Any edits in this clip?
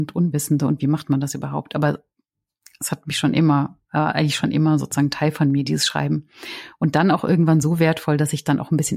no; 0 cuts

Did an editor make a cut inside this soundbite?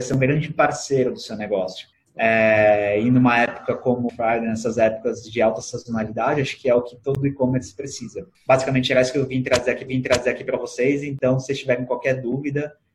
yes; 4 cuts; at 1.9 s, 4.1 s, 8.3 s, 9.9 s

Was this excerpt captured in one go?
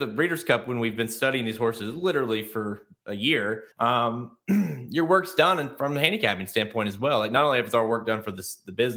no; 1 cut; at 3.7 s

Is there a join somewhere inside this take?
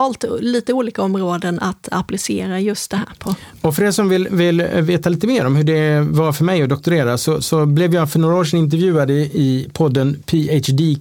no; 0 cuts

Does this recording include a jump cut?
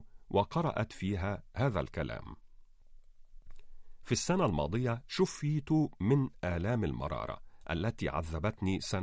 no; 0 cuts

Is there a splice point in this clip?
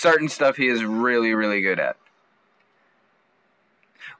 no; 0 cuts

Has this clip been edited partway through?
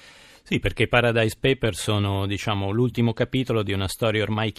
no; 0 cuts

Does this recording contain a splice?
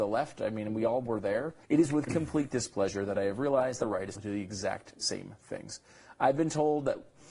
yes; 3 cuts; at 1.6 s, 3.8 s, 4.1 s

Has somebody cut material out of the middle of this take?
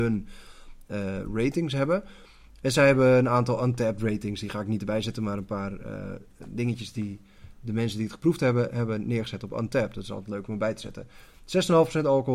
no; 0 cuts

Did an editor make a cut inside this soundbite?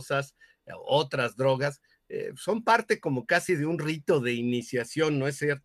no; 0 cuts

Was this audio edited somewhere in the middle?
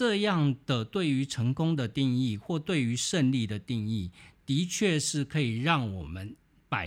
no; 0 cuts

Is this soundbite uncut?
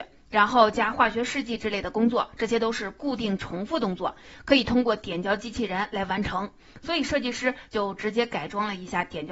yes; 0 cuts

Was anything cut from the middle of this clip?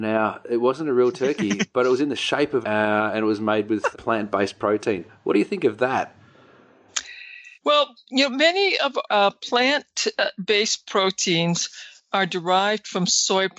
yes; 4 cuts; at 2.6 s, 3.9 s, 7.6 s, 9.1 s

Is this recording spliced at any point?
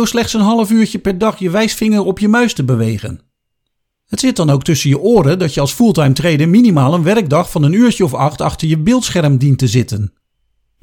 no; 0 cuts

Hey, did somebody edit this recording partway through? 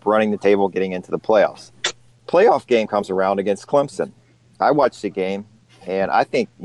no; 0 cuts

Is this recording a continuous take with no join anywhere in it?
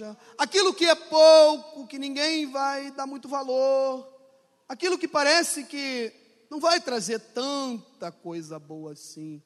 yes; 0 cuts

